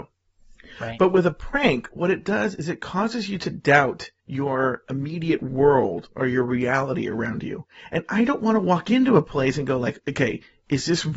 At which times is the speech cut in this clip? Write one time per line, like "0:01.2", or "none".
0:04.2